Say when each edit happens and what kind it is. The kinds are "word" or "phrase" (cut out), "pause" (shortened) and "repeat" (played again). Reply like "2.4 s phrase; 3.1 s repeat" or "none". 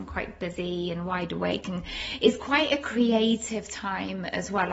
none